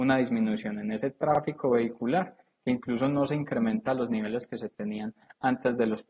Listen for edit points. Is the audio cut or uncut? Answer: uncut